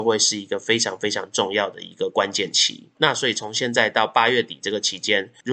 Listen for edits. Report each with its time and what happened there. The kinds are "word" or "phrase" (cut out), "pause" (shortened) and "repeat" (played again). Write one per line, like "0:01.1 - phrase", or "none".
0:02.9 - pause